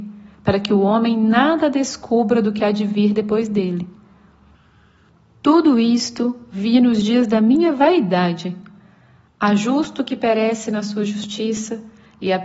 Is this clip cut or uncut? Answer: uncut